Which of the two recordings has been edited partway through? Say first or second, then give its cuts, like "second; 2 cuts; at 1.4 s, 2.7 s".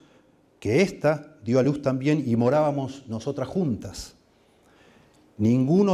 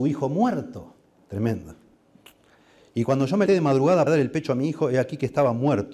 second; 2 cuts; at 3.5 s, 4.1 s